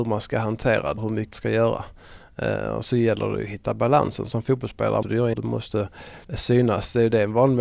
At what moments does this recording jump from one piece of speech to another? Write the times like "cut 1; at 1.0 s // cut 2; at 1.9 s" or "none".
cut 1; at 1.0 s // cut 2; at 1.3 s // cut 3; at 5.0 s // cut 4; at 5.3 s // cut 5; at 6.2 s